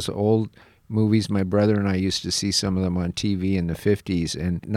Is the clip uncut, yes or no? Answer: yes